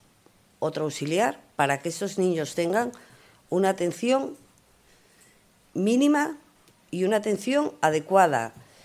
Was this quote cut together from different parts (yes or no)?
no